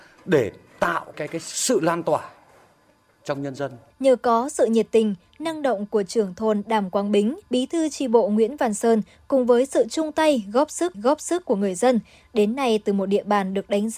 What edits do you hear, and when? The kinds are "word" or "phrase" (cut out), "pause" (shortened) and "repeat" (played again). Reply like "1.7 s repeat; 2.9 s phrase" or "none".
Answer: 1.1 s word; 7.5 s pause; 10.9 s repeat